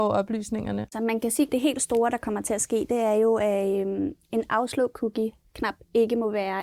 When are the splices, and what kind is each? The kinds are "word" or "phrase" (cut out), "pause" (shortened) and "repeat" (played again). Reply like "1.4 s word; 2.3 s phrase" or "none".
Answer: none